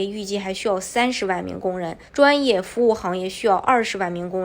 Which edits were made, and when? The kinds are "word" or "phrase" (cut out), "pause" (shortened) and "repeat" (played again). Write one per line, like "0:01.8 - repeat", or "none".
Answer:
0:02.1 - pause